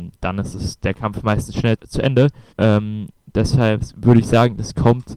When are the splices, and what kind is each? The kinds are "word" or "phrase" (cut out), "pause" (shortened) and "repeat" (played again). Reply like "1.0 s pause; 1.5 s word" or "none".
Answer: 1.8 s word; 2.5 s pause